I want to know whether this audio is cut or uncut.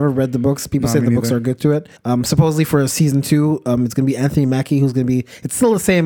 cut